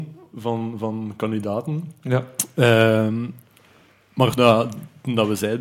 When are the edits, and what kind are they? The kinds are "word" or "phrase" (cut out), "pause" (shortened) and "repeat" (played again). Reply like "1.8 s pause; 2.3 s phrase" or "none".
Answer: 4.4 s word